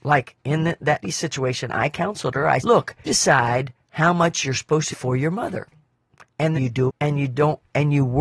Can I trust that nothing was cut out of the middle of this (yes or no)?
no